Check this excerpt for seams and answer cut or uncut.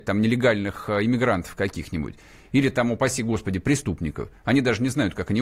uncut